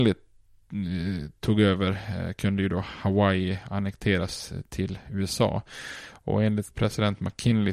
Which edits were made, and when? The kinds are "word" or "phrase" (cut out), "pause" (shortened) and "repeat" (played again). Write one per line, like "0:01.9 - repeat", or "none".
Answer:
none